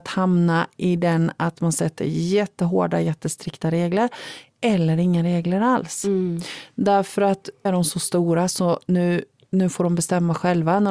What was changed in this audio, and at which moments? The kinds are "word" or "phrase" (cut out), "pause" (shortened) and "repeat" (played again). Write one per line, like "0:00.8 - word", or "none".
0:07.7 - phrase